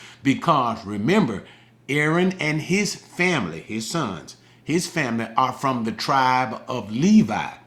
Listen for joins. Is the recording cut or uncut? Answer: uncut